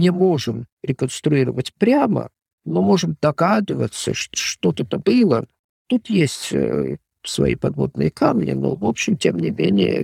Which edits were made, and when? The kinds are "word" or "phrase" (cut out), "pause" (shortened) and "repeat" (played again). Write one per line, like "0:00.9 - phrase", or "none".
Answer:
0:04.3 - word
0:05.0 - word